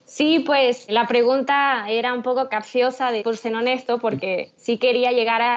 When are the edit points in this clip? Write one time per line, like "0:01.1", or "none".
0:03.2